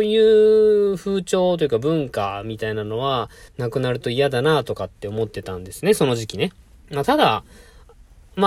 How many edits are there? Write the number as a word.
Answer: two